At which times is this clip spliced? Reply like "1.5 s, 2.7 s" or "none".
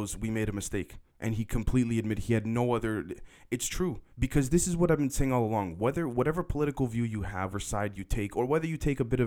1.1 s, 4.1 s, 7.5 s